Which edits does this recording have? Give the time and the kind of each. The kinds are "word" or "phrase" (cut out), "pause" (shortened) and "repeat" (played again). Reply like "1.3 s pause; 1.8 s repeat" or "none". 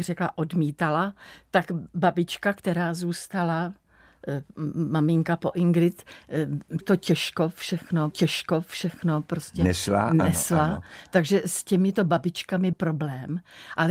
6.8 s word; 8.1 s repeat; 12.7 s word